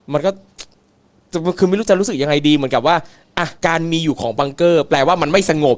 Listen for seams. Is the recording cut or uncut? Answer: cut